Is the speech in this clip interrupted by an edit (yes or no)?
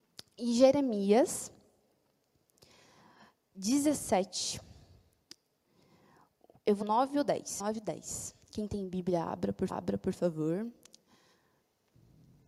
yes